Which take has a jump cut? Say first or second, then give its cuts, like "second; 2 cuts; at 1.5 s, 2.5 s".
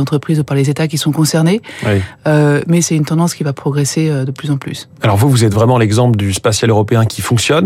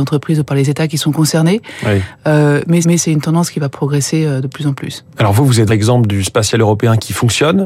second; 2 cuts; at 2.8 s, 5.7 s